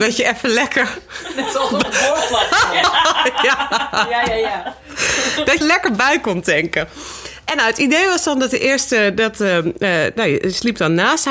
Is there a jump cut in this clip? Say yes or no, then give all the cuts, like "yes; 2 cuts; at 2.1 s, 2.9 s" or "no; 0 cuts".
yes; 1 cut; at 5.6 s